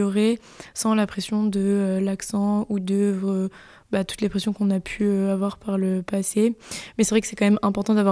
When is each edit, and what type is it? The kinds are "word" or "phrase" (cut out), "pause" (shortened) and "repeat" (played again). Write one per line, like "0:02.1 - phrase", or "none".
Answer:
none